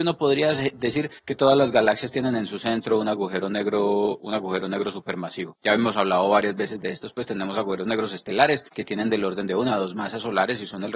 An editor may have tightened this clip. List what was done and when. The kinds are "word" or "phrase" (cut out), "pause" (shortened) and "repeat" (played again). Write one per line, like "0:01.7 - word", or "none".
none